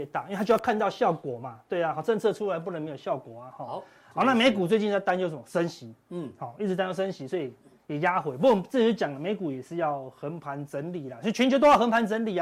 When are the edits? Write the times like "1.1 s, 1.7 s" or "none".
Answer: none